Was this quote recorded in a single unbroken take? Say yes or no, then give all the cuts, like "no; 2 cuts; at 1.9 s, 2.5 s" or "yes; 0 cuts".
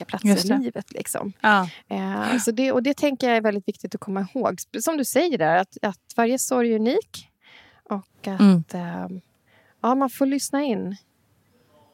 yes; 0 cuts